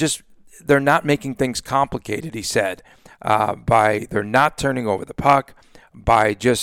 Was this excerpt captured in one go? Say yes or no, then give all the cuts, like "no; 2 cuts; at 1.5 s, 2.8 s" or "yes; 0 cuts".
yes; 0 cuts